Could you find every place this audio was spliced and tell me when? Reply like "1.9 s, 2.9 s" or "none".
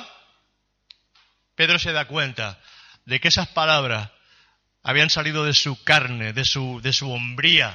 none